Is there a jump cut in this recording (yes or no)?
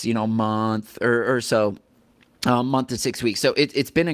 no